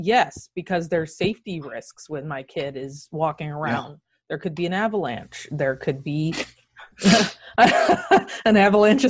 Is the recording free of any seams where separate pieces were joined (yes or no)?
yes